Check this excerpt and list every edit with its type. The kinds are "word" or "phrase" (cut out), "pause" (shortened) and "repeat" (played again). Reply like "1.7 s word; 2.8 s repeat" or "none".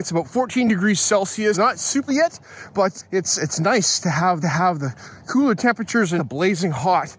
1.5 s word; 2.1 s word; 3.0 s word; 4.4 s repeat; 6.2 s phrase